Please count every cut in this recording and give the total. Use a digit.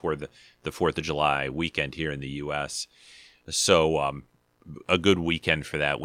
0